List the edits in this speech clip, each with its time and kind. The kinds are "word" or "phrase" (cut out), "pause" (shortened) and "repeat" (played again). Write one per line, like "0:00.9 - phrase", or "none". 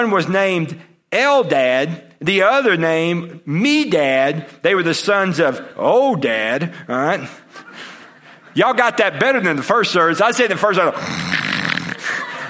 none